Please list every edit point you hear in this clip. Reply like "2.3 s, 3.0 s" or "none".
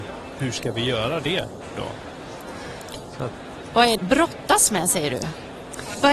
4.0 s